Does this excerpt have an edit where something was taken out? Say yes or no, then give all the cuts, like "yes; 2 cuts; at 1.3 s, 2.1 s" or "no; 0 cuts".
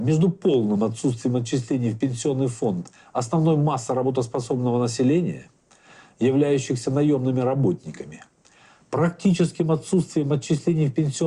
no; 0 cuts